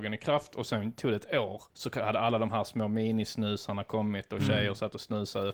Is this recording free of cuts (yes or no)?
no